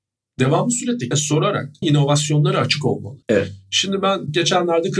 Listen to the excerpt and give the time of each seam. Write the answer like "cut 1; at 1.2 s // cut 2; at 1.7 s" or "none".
cut 1; at 1.1 s // cut 2; at 1.8 s // cut 3; at 3.2 s